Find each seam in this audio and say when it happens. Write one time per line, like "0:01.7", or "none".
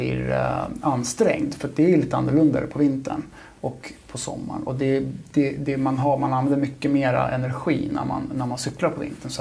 none